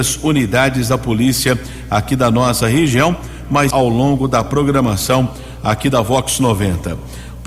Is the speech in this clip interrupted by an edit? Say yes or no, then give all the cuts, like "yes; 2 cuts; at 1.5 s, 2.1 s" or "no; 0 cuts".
yes; 1 cut; at 3.7 s